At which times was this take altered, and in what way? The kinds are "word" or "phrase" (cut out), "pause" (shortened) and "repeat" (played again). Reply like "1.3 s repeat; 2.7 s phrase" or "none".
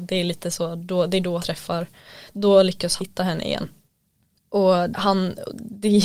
1.4 s word; 2.3 s word; 3.0 s word; 4.9 s word